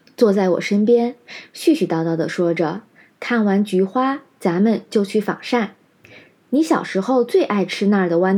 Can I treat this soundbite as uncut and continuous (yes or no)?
yes